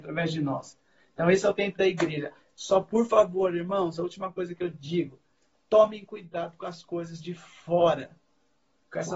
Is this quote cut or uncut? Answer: uncut